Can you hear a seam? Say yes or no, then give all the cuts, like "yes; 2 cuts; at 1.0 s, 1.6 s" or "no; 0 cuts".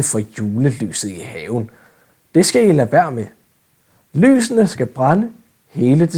no; 0 cuts